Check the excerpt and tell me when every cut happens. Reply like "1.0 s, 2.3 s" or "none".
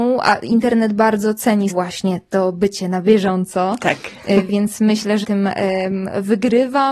1.7 s, 5.2 s